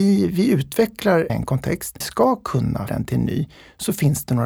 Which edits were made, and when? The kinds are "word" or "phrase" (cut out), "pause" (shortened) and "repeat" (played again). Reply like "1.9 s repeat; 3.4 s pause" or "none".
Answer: 1.3 s phrase; 2.0 s phrase; 2.9 s word